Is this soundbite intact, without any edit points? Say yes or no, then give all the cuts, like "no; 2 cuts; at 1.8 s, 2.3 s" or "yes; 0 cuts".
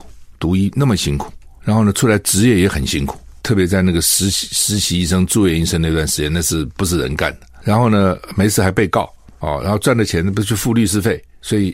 yes; 0 cuts